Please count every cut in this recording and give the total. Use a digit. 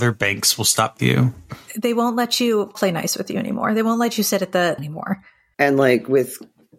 3